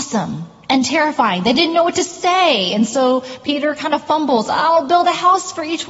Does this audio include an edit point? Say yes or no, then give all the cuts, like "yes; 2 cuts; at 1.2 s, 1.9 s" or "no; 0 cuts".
no; 0 cuts